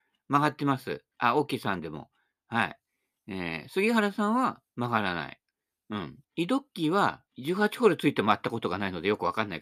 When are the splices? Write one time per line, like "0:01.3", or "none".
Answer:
0:04.7
0:06.2
0:07.3